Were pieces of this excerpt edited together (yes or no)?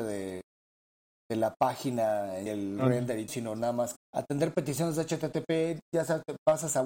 yes